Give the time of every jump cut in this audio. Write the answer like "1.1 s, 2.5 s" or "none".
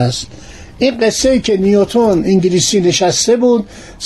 none